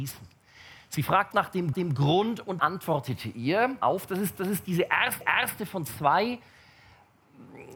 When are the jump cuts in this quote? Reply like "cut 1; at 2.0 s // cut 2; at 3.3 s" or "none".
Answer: cut 1; at 1.3 s // cut 2; at 1.7 s // cut 3; at 2.6 s // cut 4; at 3.8 s // cut 5; at 4.4 s // cut 6; at 5.2 s